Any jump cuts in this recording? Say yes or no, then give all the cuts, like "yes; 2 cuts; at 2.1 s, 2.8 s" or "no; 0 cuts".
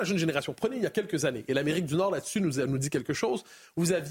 no; 0 cuts